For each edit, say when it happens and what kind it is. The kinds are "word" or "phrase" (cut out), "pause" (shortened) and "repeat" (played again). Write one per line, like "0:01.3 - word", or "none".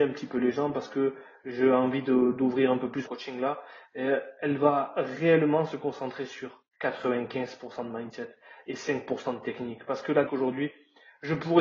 0:03.1 - word
0:06.7 - pause
0:10.3 - word

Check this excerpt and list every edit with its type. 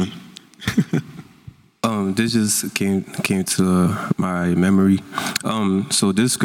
none

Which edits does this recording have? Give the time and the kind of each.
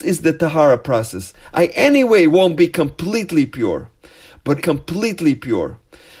0:04.6 - repeat

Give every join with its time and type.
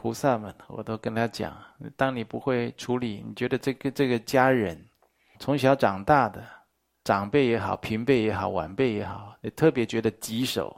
0:05.3 - word

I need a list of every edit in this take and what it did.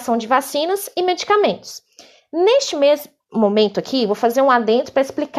none

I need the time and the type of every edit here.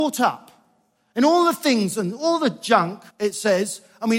0:03.1 - pause

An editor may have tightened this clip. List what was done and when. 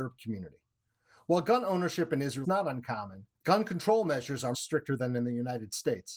0:02.4 - word
0:03.3 - pause
0:04.5 - word

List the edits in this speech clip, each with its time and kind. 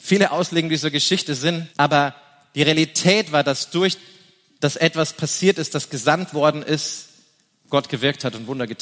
0:01.7 - pause

